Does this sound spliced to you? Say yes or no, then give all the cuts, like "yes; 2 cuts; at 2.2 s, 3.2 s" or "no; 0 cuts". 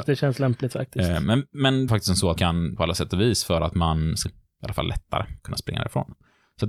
yes; 5 cuts; at 1.9 s, 2.4 s, 2.7 s, 4.2 s, 5.4 s